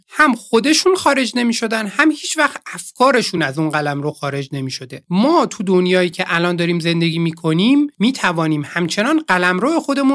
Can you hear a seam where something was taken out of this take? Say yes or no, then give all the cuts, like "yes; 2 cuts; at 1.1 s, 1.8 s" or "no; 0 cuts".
no; 0 cuts